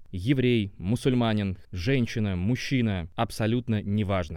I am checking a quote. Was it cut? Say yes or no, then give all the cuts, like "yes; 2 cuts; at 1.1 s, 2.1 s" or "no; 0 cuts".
yes; 1 cut; at 1.6 s